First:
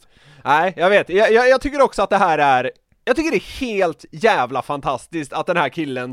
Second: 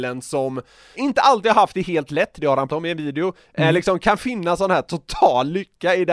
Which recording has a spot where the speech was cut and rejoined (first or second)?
second